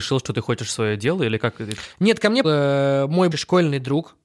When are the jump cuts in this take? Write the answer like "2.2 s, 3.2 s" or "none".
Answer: 2.4 s, 3.3 s